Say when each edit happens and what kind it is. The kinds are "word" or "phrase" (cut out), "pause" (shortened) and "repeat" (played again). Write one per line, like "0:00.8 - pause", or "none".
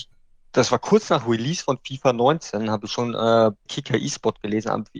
0:03.7 - word